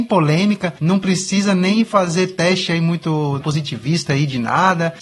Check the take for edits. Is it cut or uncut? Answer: cut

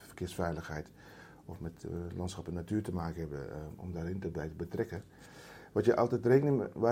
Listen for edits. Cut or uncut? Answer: uncut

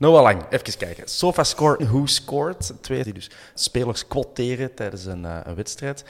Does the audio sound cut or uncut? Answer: cut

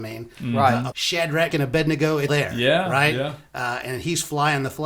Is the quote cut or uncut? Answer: cut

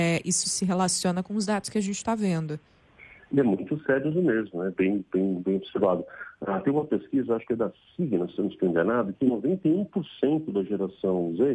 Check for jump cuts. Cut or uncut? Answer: uncut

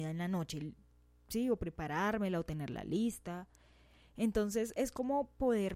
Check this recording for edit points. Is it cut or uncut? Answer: uncut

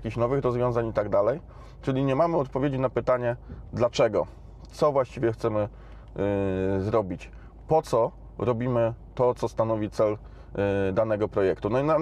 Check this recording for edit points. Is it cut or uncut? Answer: uncut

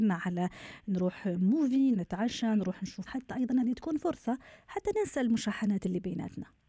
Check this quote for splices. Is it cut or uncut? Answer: cut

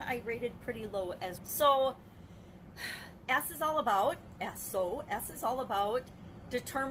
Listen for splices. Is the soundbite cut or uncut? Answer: cut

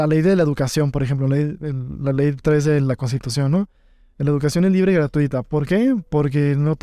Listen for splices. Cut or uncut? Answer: uncut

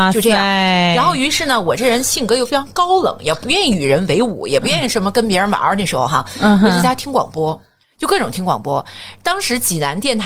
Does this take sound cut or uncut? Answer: uncut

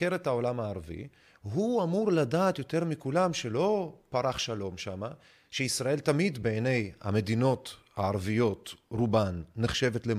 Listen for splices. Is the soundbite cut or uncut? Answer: uncut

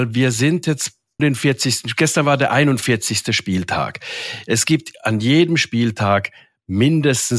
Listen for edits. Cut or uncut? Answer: cut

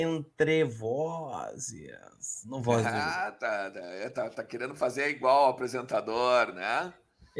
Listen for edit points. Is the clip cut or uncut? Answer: uncut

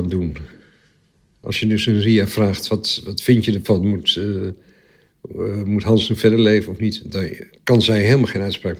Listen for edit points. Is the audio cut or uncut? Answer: cut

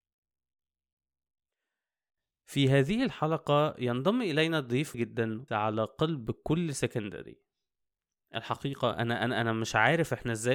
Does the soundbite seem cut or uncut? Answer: cut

